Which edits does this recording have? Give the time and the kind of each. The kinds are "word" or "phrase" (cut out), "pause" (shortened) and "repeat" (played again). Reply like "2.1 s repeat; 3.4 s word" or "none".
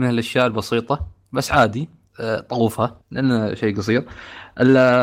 3.0 s pause